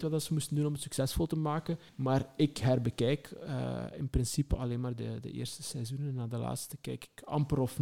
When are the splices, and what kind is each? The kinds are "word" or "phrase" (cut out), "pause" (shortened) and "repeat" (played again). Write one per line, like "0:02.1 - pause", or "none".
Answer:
0:01.9 - pause